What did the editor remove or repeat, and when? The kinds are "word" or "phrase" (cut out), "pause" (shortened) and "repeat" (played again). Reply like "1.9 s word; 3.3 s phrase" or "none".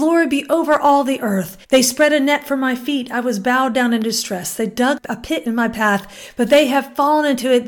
1.6 s pause